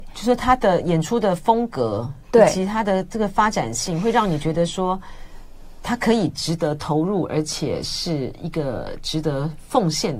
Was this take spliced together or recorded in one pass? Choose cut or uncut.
cut